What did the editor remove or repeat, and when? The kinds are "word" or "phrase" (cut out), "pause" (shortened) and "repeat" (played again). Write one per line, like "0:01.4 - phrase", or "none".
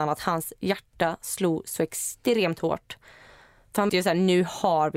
0:03.9 - word

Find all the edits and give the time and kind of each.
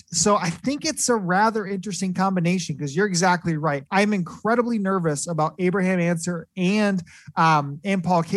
0:03.9 - pause

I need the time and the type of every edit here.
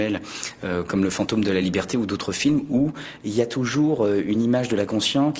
none

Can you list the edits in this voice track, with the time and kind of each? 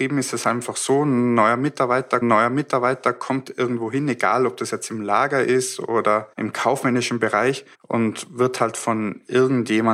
0:02.2 - repeat
0:06.3 - pause
0:07.7 - pause

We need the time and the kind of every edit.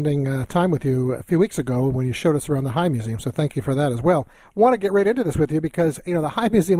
0:01.2 - word

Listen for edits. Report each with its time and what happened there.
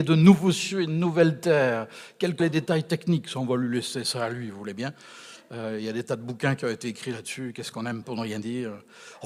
0:02.4 - word
0:08.0 - word

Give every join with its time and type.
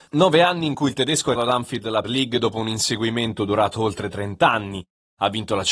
0:01.4 - word
0:02.0 - word

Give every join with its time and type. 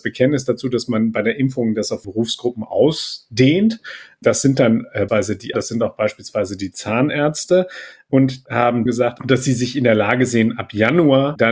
0:02.0 - word
0:05.1 - word
0:05.5 - word
0:08.5 - word
0:08.9 - phrase

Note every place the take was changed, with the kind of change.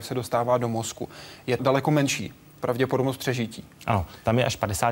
0:01.6 - word

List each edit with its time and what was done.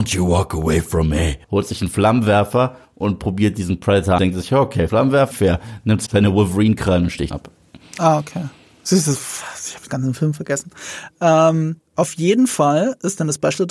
0:01.4 - pause
0:04.2 - phrase
0:04.9 - phrase
0:05.3 - phrase
0:06.1 - word
0:07.3 - word
0:09.9 - word
0:11.8 - word

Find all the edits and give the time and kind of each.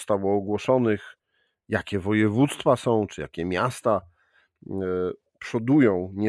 none

